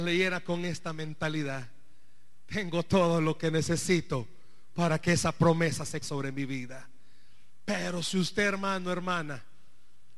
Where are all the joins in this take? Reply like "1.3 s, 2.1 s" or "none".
6.0 s